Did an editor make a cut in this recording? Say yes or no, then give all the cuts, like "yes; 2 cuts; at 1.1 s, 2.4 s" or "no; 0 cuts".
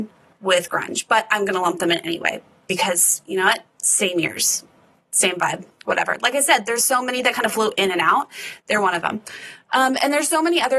no; 0 cuts